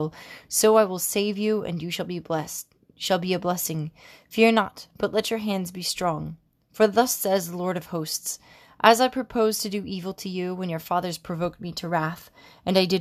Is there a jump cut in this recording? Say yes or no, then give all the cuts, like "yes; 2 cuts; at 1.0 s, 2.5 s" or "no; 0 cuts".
no; 0 cuts